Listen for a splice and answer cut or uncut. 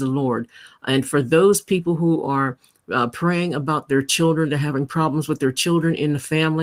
uncut